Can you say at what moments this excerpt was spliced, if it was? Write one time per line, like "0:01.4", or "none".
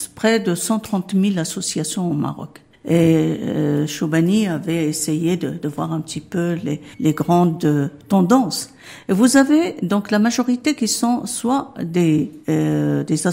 0:02.7
0:06.9
0:12.4